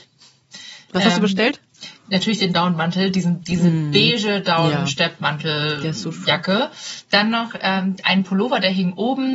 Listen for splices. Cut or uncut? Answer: uncut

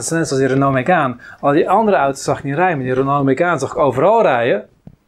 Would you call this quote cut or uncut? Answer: uncut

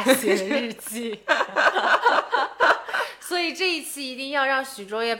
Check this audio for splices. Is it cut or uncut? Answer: uncut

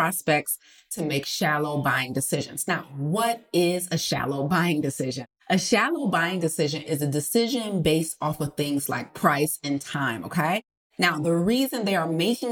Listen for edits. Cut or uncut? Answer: uncut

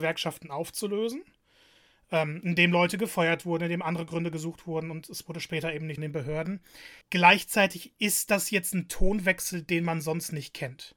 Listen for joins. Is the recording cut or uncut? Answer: cut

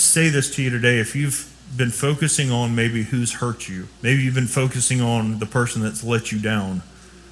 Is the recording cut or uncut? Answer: cut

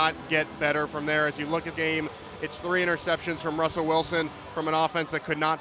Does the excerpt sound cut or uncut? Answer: cut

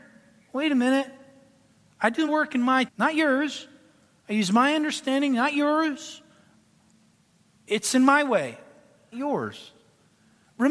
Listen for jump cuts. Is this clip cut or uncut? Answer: cut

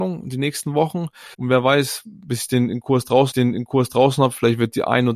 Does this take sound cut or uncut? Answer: cut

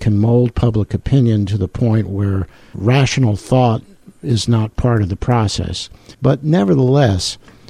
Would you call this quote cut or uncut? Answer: cut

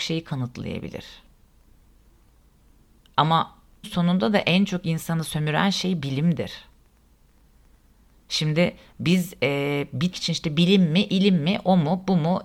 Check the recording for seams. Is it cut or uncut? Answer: cut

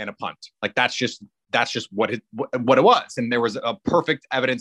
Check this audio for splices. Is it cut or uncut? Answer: uncut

